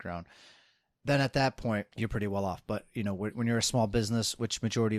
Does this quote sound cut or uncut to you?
cut